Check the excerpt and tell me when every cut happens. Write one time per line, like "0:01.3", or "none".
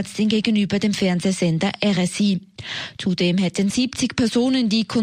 0:03.7

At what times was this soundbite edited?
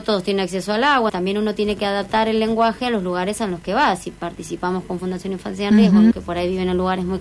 0:01.1
0:06.1

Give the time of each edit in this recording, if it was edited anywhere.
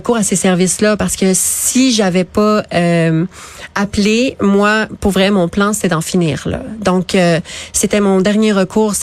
none

